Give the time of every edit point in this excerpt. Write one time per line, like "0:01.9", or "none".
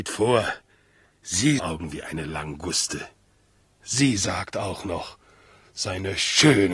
0:01.6